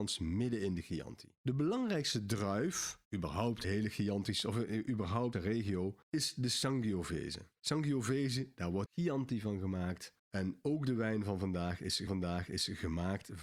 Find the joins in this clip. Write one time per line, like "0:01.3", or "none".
0:01.4
0:03.0
0:03.6
0:05.3
0:06.0
0:08.9
0:10.2
0:12.1